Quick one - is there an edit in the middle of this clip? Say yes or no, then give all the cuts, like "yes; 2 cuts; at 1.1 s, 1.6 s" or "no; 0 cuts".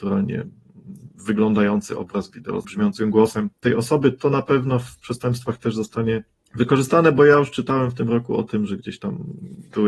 yes; 3 cuts; at 2.6 s, 3.5 s, 6.4 s